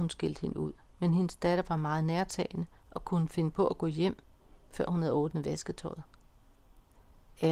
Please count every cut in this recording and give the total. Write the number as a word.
zero